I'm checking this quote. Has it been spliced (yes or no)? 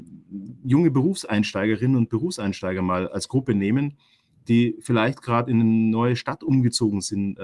yes